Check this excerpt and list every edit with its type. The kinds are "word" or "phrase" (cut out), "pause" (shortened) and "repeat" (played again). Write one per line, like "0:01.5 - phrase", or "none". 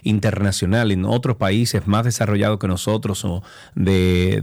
none